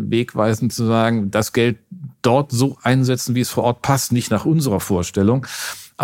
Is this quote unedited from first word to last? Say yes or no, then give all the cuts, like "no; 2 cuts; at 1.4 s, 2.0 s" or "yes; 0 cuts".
yes; 0 cuts